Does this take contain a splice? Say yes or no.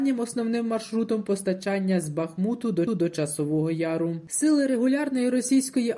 yes